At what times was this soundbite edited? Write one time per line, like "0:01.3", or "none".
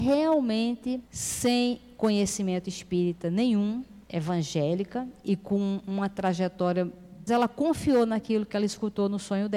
0:01.1
0:04.0
0:07.3